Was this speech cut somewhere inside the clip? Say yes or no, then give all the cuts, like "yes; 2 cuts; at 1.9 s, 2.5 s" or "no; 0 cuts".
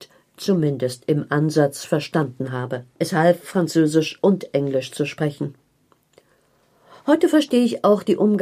yes; 1 cut; at 2.9 s